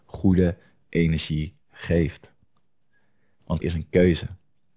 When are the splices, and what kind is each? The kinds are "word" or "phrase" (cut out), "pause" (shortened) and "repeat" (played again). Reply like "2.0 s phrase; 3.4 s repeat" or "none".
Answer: 1.6 s pause; 3.6 s word